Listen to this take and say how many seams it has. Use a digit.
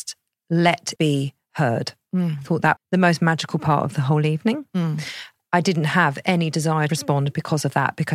3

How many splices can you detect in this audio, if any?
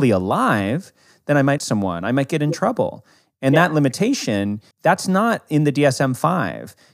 2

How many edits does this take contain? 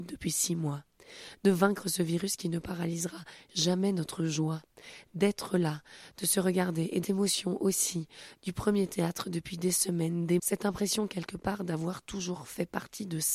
2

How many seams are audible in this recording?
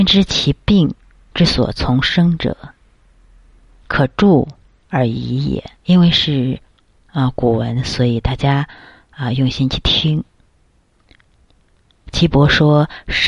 2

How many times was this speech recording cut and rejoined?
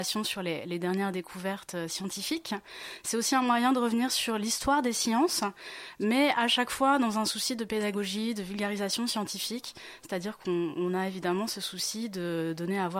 0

